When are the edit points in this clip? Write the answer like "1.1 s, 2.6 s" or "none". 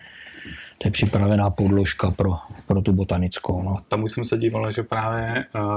none